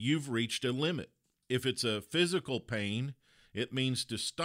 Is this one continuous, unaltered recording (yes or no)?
yes